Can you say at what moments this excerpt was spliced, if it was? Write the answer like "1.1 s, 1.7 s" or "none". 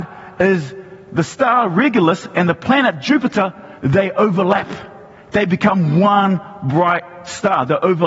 3.8 s